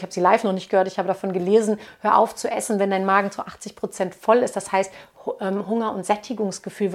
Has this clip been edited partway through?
no; 0 cuts

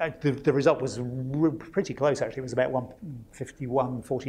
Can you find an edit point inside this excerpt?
no; 0 cuts

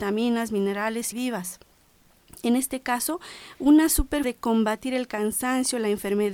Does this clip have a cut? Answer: yes; 2 cuts; at 1.1 s, 4.2 s

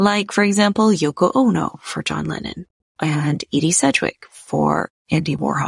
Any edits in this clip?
no; 0 cuts

